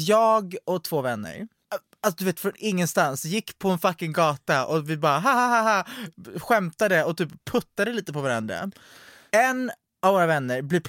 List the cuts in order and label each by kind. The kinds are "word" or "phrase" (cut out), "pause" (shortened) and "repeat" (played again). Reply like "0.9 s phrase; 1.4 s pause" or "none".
none